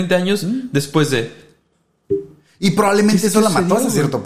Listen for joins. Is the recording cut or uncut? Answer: uncut